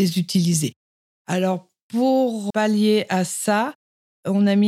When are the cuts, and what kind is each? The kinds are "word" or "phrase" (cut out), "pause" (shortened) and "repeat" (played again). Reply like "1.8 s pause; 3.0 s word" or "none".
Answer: 2.5 s word